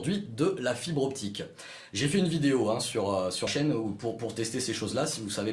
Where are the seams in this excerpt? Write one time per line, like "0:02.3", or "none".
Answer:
0:03.5